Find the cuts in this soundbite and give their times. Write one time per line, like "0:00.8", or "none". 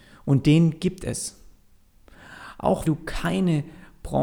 0:02.8